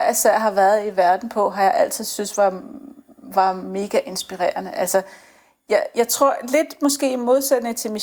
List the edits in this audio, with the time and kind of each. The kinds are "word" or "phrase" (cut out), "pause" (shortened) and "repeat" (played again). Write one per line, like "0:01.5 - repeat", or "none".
none